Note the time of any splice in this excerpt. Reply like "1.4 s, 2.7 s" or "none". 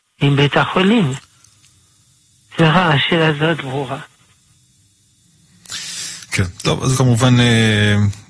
3.6 s, 6.9 s